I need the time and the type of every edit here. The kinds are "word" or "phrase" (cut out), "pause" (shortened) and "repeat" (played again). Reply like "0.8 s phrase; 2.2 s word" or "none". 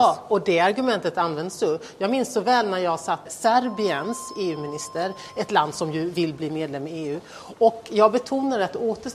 3.3 s word

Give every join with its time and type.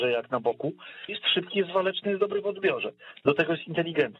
1.1 s word

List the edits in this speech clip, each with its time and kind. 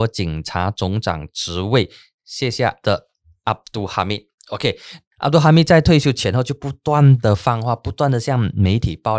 2.8 s word

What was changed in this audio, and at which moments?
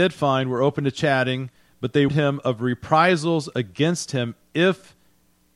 2.1 s word

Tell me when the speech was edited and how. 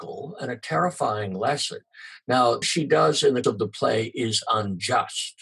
2.6 s word; 3.4 s word

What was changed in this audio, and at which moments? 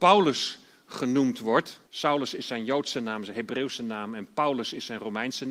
1.9 s pause

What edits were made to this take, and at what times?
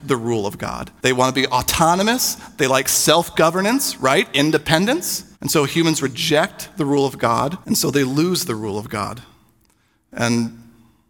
1.0 s pause; 5.3 s pause; 7.6 s pause

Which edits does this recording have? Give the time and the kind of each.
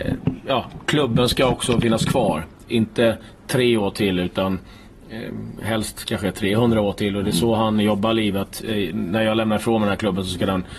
none

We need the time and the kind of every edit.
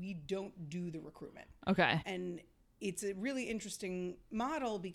2.0 s word

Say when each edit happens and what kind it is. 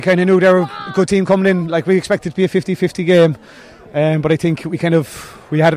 none

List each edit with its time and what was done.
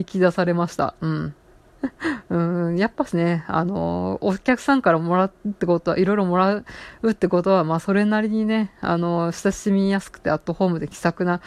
none

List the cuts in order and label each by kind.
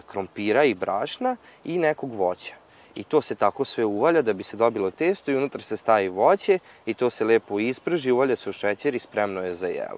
none

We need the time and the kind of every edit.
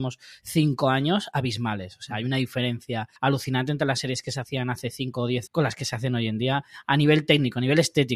3.2 s pause; 5.5 s word

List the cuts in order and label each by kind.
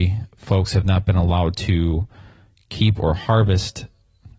none

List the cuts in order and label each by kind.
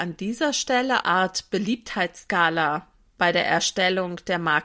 1.0 s phrase

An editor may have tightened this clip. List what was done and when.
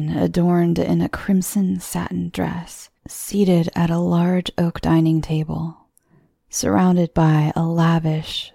3.0 s pause

